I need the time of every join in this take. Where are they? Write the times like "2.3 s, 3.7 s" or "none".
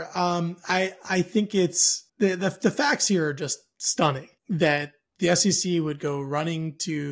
2.1 s, 4.4 s